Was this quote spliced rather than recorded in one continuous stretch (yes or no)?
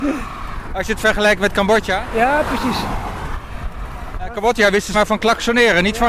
yes